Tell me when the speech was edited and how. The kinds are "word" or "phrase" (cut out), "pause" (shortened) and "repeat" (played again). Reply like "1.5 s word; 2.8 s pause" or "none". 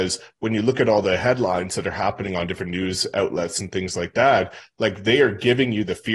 none